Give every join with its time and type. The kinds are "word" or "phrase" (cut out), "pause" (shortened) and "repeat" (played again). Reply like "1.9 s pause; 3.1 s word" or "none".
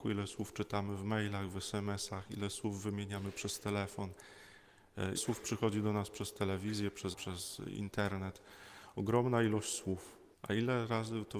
5.1 s word; 7.1 s word; 10.3 s pause